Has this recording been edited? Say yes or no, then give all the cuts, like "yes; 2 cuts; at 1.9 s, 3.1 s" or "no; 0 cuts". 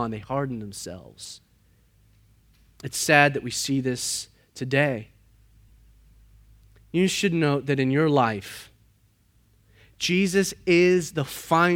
no; 0 cuts